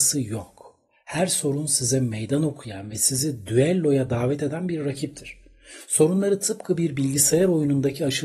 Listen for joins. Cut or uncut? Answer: uncut